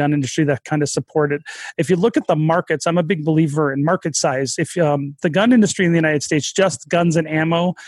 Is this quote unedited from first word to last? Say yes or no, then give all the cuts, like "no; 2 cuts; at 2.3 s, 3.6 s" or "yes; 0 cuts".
yes; 0 cuts